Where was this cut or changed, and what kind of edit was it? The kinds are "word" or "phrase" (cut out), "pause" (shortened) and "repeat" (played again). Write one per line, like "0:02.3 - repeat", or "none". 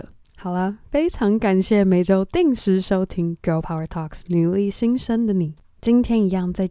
none